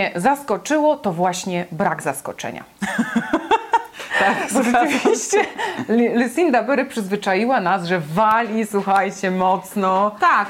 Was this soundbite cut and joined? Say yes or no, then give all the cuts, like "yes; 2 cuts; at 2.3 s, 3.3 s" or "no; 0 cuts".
no; 0 cuts